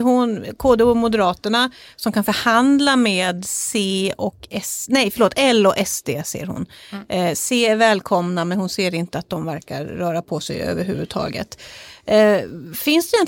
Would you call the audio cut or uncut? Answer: uncut